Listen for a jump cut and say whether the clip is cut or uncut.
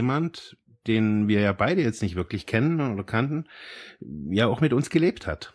uncut